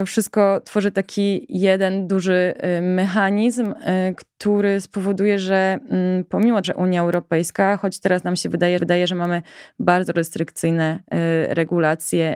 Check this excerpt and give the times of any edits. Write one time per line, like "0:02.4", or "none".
0:06.6
0:08.8